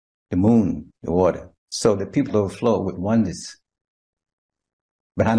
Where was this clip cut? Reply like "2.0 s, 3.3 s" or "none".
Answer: 0.9 s, 1.6 s, 2.3 s